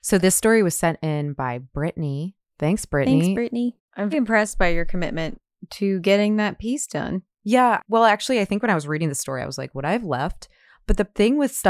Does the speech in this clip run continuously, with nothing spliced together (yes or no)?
no